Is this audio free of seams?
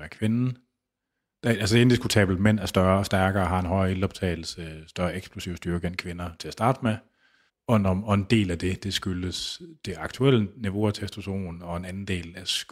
no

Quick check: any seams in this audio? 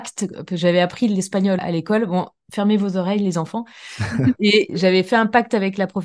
yes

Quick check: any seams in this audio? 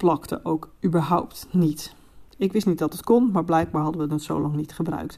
yes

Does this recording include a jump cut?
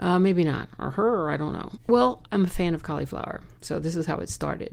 yes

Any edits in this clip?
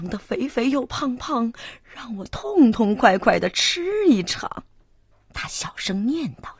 yes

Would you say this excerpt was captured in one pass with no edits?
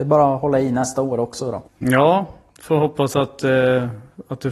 no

